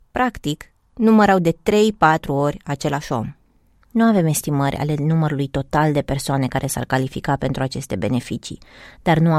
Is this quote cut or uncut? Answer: uncut